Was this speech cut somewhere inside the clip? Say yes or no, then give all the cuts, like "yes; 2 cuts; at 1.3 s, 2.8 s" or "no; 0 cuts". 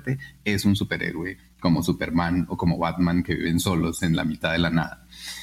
no; 0 cuts